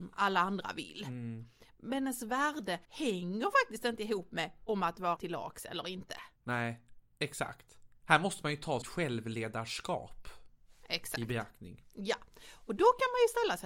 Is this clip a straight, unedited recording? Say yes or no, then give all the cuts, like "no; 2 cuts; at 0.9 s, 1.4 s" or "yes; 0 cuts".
no; 4 cuts; at 2.8 s, 5.2 s, 6.4 s, 8.8 s